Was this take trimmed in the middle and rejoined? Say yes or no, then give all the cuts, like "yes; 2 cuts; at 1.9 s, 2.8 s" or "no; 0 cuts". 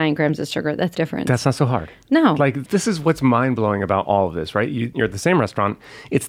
yes; 2 cuts; at 0.9 s, 2.6 s